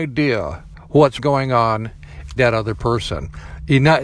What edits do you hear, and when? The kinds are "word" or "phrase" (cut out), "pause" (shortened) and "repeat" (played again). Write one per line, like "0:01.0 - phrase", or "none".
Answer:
0:01.2 - word
0:02.4 - word